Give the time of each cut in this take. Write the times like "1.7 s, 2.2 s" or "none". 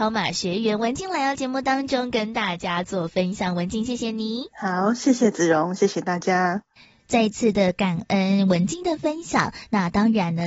4.5 s